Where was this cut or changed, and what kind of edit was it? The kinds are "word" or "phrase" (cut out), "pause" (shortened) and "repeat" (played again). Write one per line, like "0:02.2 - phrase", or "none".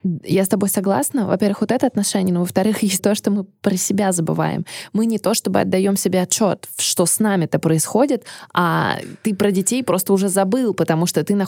0:03.0 - word